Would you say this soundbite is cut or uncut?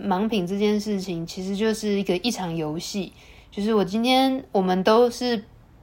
uncut